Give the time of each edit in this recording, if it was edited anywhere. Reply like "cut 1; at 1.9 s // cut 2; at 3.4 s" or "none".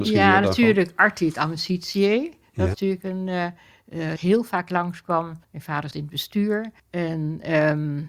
cut 1; at 2.7 s // cut 2; at 4.2 s // cut 3; at 5.4 s // cut 4; at 5.9 s // cut 5; at 6.8 s